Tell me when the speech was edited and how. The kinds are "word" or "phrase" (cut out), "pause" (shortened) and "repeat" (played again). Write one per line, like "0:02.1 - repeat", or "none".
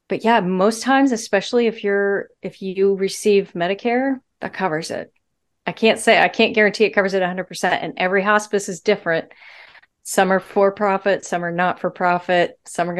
none